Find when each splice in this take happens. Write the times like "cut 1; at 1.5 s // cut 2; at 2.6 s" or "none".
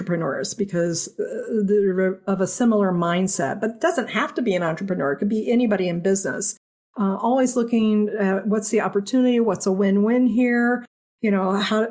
none

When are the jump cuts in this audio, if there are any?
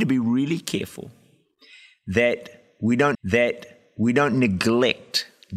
cut 1; at 3.1 s

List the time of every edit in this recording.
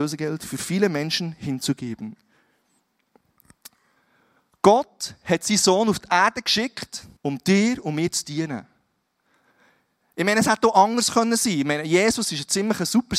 cut 1; at 7.2 s

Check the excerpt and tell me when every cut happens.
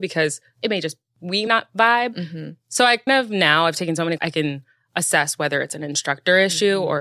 cut 1; at 1.5 s // cut 2; at 3.1 s // cut 3; at 4.2 s

